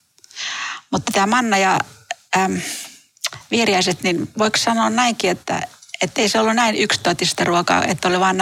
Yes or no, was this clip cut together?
no